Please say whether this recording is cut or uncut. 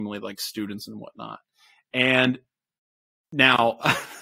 uncut